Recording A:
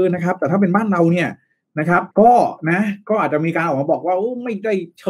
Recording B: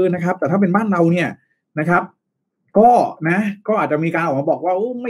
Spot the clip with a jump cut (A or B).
A